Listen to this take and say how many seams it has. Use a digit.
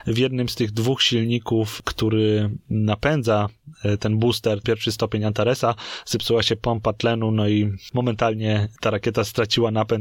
1